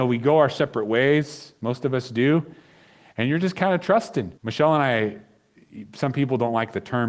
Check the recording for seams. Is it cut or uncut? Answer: cut